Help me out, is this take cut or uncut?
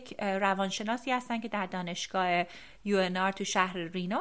uncut